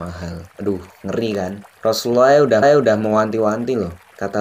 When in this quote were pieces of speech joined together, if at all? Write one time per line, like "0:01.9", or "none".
0:02.6